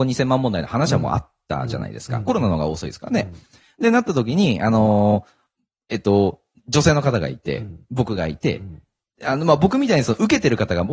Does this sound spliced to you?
no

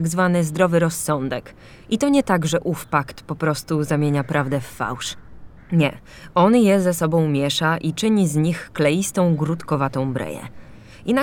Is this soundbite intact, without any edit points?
yes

